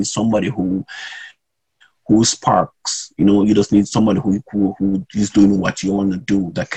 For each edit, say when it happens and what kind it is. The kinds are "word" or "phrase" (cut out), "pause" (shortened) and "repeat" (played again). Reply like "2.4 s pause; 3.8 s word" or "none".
none